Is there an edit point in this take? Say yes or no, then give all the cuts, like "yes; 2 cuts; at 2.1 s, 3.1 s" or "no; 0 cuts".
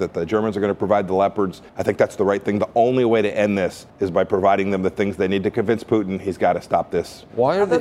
yes; 2 cuts; at 1.7 s, 3.9 s